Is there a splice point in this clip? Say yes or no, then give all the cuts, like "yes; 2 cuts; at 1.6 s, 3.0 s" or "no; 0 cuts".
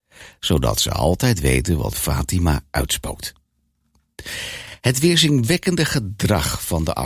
yes; 1 cut; at 1.9 s